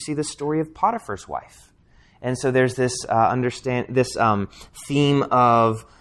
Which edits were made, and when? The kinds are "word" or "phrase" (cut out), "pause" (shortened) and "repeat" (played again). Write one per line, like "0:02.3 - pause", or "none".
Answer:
none